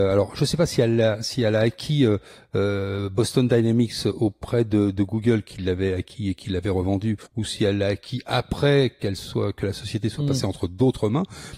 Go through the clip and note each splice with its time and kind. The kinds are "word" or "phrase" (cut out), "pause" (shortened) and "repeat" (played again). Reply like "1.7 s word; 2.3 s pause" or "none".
7.3 s pause